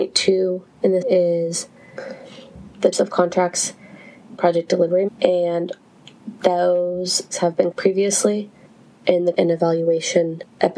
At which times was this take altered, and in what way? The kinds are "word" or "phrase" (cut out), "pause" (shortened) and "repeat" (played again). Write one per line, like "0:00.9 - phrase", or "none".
0:01.0 - word
0:02.9 - word
0:04.4 - word
0:05.1 - word
0:07.3 - word
0:07.7 - word
0:09.3 - word